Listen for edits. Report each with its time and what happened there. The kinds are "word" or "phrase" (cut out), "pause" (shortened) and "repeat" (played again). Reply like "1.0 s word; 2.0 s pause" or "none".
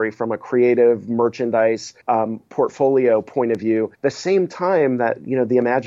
2.0 s pause; 3.9 s pause